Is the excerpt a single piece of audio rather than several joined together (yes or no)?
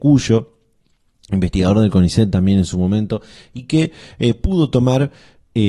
yes